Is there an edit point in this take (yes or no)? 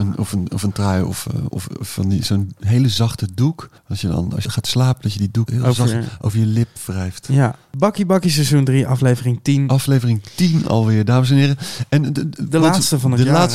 yes